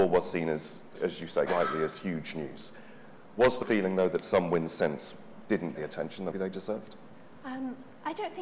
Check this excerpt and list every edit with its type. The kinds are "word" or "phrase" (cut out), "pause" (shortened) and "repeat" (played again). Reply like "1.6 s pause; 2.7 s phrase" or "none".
1.0 s word; 1.5 s word; 3.6 s word; 5.8 s word; 6.3 s word